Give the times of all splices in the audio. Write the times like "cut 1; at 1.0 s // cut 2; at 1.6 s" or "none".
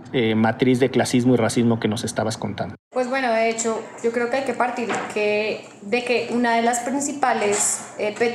cut 1; at 2.8 s